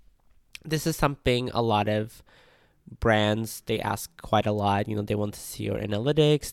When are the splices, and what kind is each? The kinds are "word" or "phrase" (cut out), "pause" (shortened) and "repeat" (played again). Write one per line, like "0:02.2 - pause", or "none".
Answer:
none